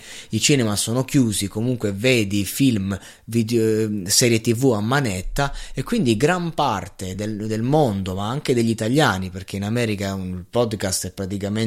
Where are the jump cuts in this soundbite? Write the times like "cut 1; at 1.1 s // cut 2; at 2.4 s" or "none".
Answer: none